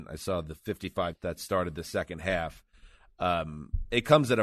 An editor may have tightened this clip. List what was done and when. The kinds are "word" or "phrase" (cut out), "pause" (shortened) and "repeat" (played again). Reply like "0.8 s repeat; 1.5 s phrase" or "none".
1.1 s word